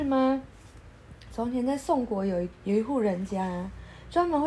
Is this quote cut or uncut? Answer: cut